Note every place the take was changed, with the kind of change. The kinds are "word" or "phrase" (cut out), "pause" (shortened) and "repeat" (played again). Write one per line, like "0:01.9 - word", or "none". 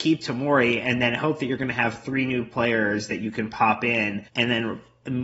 0:04.3 - pause